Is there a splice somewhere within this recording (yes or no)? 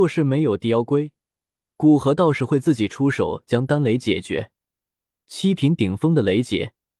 no